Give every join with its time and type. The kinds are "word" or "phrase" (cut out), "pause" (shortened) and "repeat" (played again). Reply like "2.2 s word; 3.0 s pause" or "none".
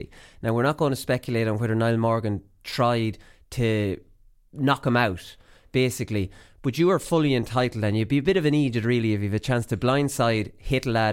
none